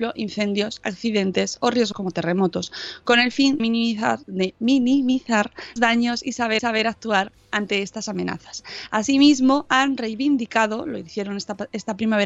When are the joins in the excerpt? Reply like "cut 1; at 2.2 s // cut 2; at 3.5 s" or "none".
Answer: cut 1; at 1.9 s // cut 2; at 3.6 s // cut 3; at 4.2 s // cut 4; at 5.8 s // cut 5; at 6.6 s